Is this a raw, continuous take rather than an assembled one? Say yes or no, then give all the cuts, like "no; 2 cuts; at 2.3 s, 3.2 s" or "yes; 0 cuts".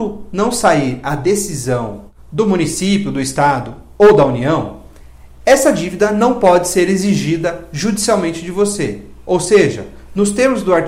yes; 0 cuts